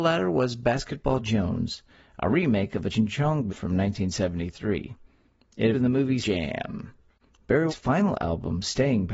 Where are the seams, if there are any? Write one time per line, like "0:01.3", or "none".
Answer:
0:02.9
0:03.5
0:05.7
0:06.2
0:07.7